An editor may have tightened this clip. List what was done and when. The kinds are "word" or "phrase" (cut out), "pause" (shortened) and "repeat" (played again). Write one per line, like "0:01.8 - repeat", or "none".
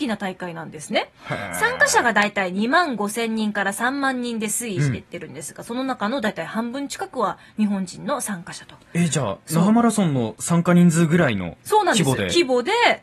0:11.6 - pause